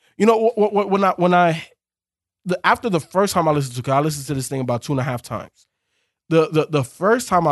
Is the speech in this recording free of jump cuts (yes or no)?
yes